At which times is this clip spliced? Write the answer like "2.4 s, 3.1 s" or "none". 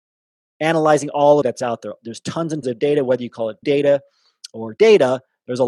1.4 s, 2.6 s, 3.6 s, 4.8 s